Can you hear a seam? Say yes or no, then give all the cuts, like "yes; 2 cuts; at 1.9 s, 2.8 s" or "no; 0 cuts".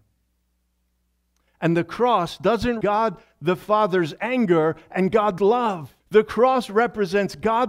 yes; 3 cuts; at 2.8 s, 5.4 s, 6.0 s